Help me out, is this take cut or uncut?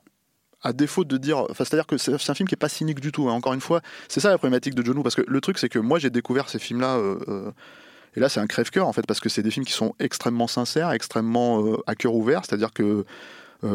uncut